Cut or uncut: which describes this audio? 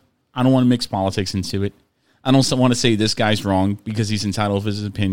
uncut